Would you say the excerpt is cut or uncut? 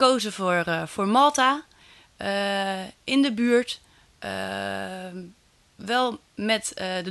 uncut